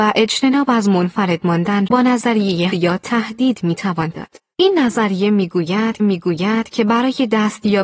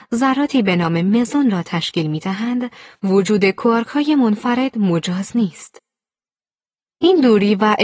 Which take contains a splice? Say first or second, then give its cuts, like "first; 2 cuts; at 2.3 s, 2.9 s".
first; 5 cuts; at 1.9 s, 2.7 s, 4.1 s, 4.5 s, 6.0 s